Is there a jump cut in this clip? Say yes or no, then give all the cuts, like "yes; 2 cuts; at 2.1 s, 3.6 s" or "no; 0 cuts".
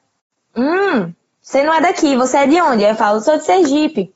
no; 0 cuts